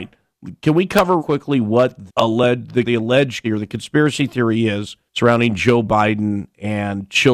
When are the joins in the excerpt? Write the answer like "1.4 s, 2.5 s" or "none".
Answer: 1.2 s, 2.1 s, 2.8 s, 3.4 s, 5.1 s